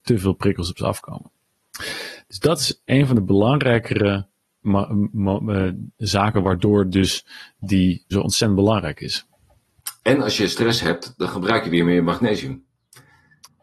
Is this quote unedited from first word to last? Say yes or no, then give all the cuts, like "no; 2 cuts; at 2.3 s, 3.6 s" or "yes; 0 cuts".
no; 1 cut; at 8.1 s